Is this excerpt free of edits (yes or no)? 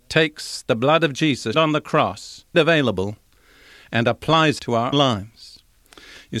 no